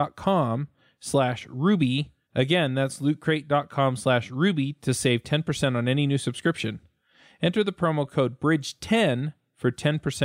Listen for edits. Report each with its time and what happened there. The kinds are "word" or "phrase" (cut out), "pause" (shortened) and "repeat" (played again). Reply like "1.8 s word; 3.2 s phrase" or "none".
none